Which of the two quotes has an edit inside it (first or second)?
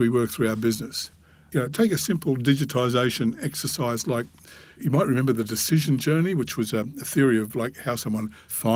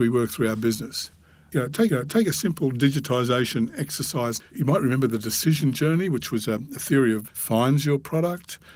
second